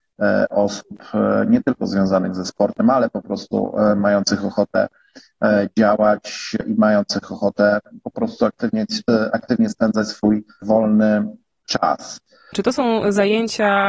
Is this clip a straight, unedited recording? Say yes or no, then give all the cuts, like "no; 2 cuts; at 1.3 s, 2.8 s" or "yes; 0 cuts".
yes; 0 cuts